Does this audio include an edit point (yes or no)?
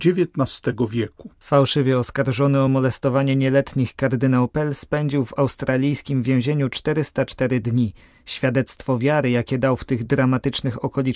no